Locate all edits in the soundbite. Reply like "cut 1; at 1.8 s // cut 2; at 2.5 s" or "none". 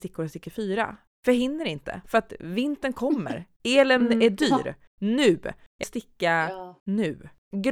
cut 1; at 5.8 s